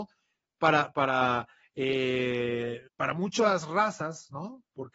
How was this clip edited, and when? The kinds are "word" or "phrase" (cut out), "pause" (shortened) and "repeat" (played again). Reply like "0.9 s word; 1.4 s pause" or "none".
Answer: 0.9 s word; 2.9 s pause